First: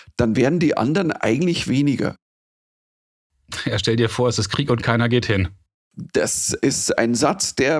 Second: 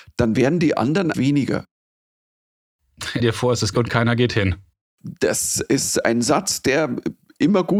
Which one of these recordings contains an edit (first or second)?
second